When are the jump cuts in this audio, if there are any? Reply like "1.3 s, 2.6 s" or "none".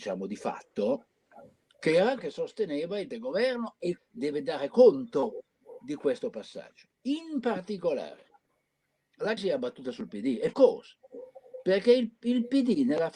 2.2 s, 3.1 s, 4.0 s, 9.4 s, 10.5 s